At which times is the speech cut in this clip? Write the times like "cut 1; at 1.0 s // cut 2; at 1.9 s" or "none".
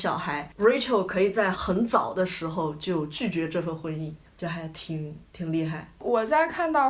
cut 1; at 4.3 s